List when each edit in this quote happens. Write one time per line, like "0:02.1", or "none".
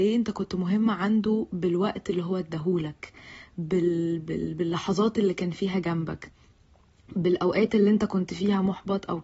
none